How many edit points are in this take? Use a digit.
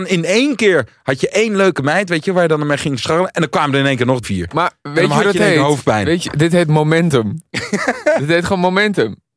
1